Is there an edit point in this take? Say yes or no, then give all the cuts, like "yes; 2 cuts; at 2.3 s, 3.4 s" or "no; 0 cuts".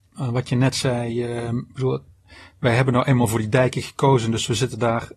no; 0 cuts